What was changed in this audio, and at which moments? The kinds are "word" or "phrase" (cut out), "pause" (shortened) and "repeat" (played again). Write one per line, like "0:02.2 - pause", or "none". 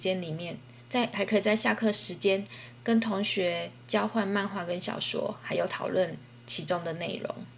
0:03.8 - pause